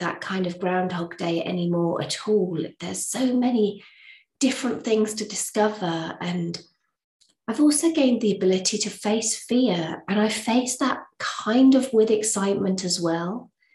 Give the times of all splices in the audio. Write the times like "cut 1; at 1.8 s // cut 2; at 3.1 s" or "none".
none